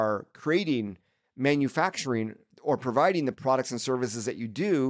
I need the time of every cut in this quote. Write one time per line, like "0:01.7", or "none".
none